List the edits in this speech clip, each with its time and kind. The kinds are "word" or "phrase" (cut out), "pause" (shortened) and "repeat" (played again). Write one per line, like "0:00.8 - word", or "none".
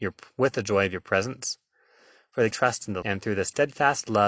0:02.5 - word
0:03.0 - word